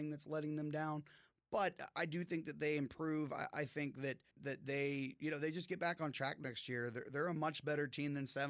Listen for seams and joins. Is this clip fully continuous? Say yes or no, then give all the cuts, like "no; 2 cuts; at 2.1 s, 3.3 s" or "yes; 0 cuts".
no; 1 cut; at 4.3 s